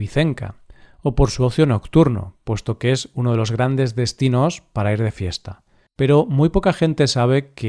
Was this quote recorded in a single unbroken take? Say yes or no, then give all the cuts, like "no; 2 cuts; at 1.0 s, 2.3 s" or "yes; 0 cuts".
no; 1 cut; at 5.9 s